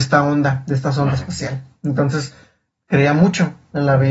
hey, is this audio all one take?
yes; 0 cuts

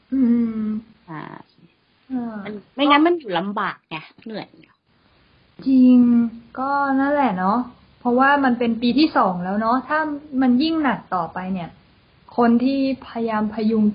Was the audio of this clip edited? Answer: no; 0 cuts

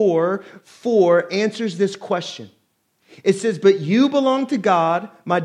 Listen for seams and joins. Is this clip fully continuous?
yes; 0 cuts

